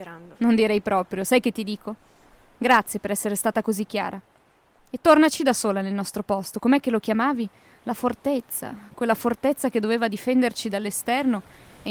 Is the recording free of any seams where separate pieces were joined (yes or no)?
yes